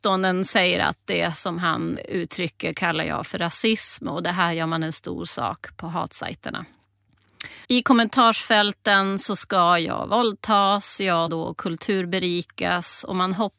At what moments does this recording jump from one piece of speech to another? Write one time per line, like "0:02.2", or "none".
0:07.6
0:11.3